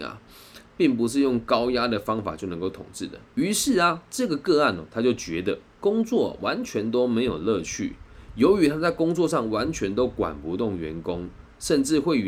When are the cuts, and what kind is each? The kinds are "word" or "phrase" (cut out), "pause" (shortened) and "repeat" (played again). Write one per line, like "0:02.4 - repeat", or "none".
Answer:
0:03.3 - pause